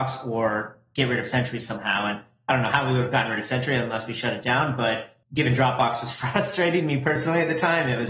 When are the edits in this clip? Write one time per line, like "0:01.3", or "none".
0:05.2